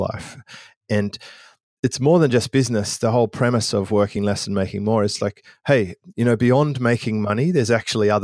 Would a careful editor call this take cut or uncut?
uncut